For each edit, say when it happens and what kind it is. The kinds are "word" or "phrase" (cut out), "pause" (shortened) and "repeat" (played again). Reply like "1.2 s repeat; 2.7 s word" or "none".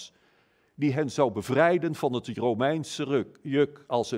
none